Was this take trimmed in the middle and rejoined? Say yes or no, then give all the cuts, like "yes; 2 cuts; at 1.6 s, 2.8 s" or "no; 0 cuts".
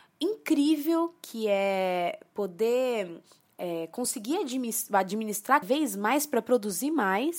yes; 1 cut; at 5.6 s